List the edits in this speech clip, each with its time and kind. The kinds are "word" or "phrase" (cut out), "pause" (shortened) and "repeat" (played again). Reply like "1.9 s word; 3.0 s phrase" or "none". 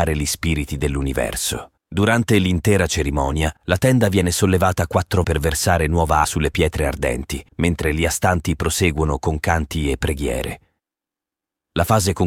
1.8 s pause; 3.6 s pause; 5.2 s word; 6.2 s word; 7.5 s pause